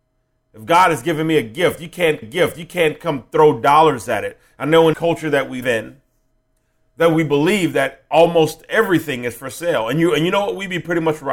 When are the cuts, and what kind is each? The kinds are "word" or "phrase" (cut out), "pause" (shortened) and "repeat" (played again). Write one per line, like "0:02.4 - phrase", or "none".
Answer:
0:02.2 - repeat
0:04.9 - phrase
0:05.6 - word